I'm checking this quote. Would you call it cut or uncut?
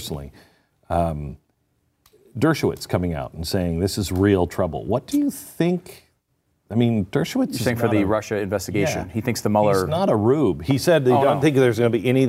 uncut